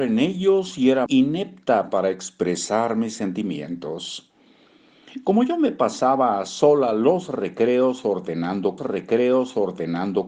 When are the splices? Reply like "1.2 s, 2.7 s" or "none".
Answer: 1.1 s, 8.8 s